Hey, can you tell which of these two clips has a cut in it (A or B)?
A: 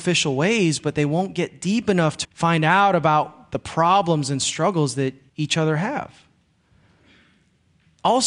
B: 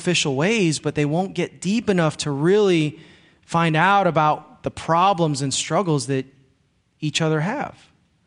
A